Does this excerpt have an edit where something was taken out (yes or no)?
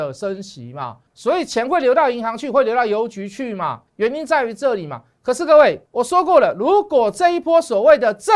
yes